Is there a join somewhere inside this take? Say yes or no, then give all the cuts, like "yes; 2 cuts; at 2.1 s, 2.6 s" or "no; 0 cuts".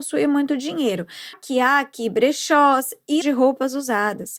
yes; 2 cuts; at 1.3 s, 3.2 s